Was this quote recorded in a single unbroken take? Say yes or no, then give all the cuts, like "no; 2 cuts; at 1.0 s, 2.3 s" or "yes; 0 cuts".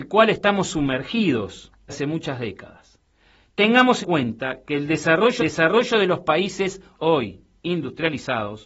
no; 4 cuts; at 1.9 s, 4.0 s, 5.4 s, 6.9 s